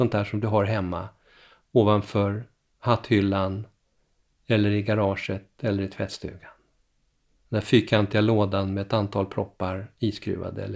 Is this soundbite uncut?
yes; 0 cuts

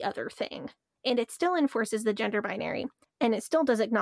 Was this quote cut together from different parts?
no; 0 cuts

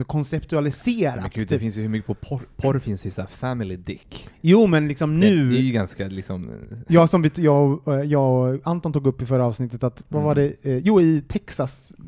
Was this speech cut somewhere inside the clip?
no; 0 cuts

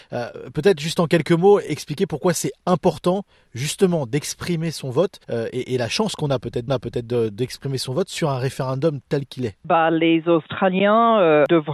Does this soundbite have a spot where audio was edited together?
yes; 2 cuts; at 5.2 s, 6.7 s

